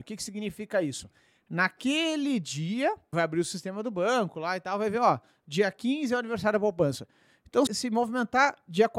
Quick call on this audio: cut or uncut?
cut